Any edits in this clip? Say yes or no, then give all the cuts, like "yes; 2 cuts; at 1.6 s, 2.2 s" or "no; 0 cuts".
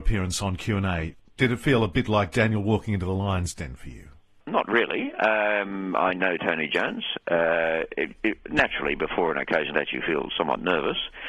yes; 1 cut; at 9.7 s